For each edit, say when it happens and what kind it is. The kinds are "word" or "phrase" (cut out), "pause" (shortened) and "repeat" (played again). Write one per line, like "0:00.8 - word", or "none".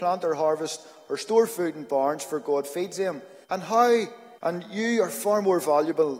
0:03.4 - pause
0:04.4 - pause